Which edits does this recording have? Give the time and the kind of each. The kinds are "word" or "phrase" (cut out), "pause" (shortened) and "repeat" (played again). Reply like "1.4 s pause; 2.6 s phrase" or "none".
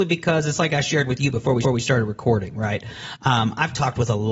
1.6 s repeat